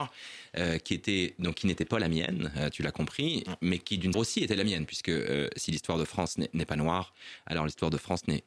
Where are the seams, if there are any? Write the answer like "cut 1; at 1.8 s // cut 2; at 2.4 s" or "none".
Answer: cut 1; at 4.1 s